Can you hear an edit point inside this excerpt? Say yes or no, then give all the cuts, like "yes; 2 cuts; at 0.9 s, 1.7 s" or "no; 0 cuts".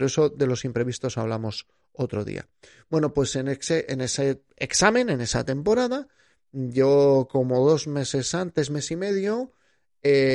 no; 0 cuts